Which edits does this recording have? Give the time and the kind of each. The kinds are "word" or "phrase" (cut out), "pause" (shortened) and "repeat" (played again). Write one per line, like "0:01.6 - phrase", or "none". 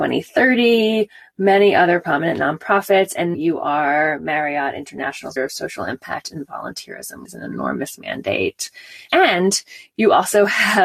0:03.3 - word
0:05.4 - word
0:07.3 - word

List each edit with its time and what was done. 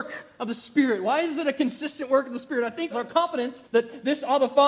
0:02.9 - word
0:03.6 - pause

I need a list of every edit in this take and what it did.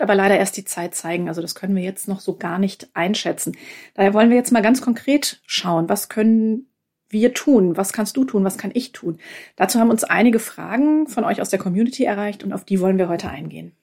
none

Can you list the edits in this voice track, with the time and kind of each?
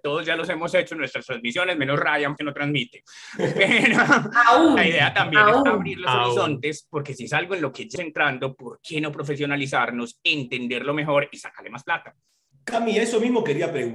0:02.4 - word
0:08.0 - word

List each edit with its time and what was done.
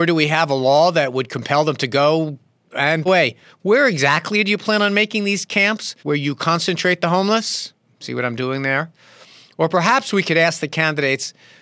0:03.1 - phrase
0:06.0 - pause

